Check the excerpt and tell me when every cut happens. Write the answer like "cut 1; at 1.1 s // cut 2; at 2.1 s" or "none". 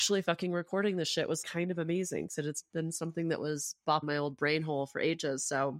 cut 1; at 1.4 s // cut 2; at 4.0 s